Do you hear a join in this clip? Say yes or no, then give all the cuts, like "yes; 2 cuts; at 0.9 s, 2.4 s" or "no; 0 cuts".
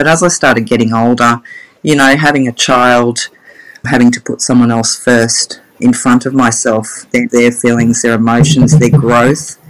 yes; 3 cuts; at 3.8 s, 5.8 s, 7.3 s